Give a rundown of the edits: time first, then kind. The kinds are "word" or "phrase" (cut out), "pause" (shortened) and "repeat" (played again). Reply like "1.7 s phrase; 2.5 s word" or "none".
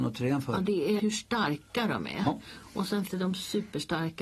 1.0 s word; 3.1 s word